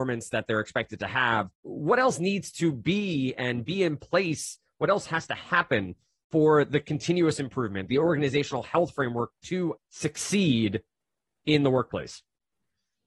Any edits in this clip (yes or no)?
yes